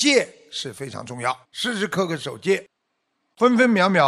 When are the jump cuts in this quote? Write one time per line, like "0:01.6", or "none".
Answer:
0:01.4